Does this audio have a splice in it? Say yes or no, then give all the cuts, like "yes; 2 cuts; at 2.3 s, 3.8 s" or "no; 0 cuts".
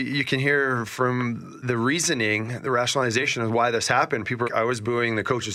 yes; 2 cuts; at 1.6 s, 4.4 s